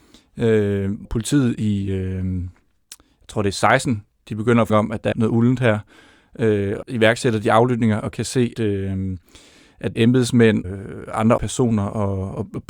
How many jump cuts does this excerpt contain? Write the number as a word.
eight